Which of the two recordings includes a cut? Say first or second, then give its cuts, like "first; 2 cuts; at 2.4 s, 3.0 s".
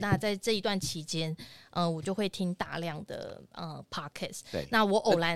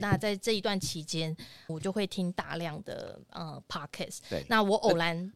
second; 1 cut; at 1.7 s